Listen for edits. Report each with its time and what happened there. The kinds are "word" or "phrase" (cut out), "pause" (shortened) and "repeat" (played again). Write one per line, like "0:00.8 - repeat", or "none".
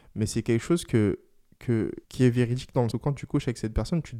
0:02.0 - pause
0:02.9 - word